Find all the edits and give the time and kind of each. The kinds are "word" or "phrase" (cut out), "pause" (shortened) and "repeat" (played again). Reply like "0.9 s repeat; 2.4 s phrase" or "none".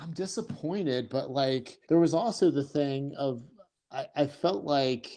1.8 s pause